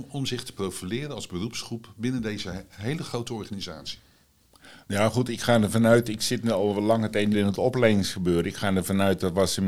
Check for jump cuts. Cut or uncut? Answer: cut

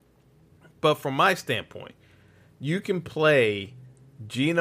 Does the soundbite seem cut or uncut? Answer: uncut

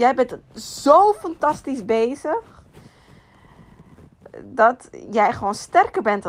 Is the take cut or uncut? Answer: uncut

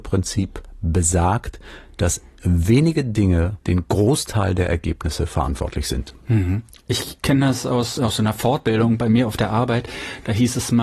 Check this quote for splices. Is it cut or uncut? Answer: cut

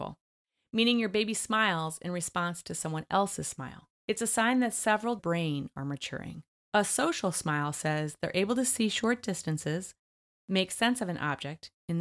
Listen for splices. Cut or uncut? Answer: cut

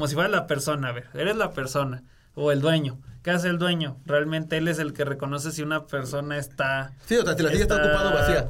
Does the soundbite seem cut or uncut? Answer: uncut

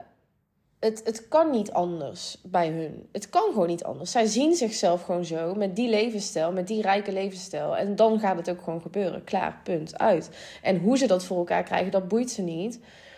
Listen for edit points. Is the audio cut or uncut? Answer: uncut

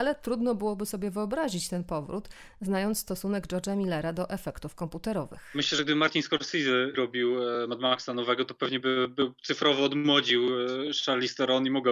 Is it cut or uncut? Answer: uncut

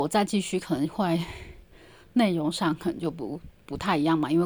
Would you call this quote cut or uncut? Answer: uncut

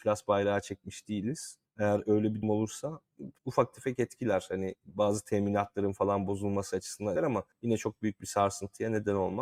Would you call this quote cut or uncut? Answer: cut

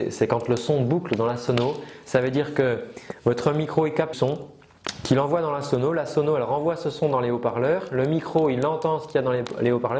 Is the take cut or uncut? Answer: cut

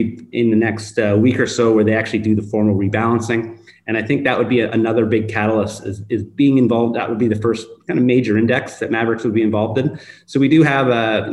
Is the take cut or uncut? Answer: uncut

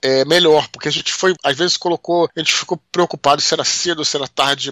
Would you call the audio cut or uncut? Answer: uncut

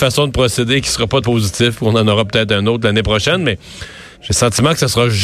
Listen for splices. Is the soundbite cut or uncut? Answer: cut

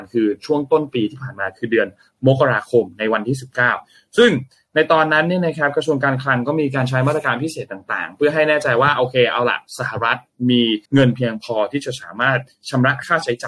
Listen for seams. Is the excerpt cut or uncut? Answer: cut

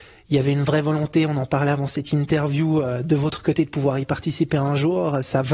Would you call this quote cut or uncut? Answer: uncut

